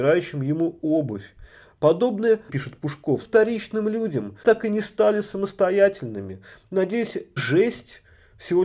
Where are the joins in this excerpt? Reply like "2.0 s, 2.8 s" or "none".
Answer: 2.5 s, 3.2 s, 4.4 s, 7.4 s